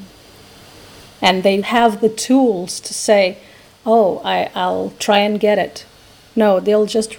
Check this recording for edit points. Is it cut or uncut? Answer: cut